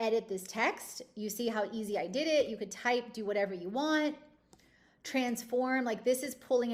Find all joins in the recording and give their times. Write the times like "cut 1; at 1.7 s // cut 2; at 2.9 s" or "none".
none